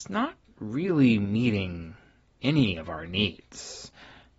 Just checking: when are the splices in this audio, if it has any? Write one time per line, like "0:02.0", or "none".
none